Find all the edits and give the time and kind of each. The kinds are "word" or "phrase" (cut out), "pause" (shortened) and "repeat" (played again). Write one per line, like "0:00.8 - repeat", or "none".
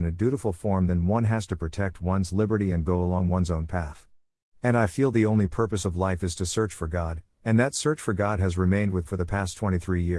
0:09.1 - word